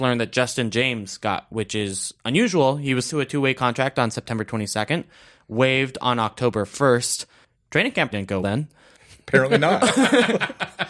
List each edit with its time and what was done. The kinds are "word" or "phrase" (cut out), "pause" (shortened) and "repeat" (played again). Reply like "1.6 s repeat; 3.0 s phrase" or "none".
1.5 s word; 3.1 s word; 8.1 s word; 8.4 s word